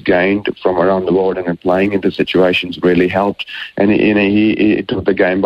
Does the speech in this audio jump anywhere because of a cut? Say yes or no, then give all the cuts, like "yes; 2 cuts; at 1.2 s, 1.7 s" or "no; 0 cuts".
no; 0 cuts